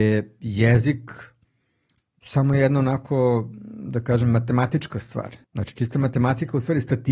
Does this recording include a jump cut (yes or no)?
yes